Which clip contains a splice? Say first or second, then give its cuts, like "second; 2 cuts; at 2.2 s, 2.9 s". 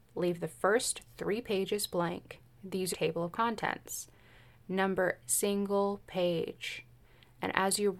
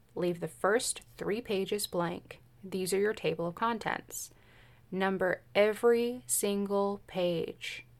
first; 2 cuts; at 2.9 s, 5.2 s